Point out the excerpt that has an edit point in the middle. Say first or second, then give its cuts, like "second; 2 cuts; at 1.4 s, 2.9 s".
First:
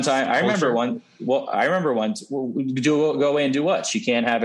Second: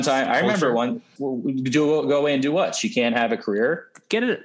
second; 1 cut; at 1.2 s